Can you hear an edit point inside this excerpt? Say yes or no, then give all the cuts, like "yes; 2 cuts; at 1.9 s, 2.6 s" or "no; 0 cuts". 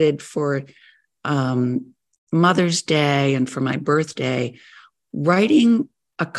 no; 0 cuts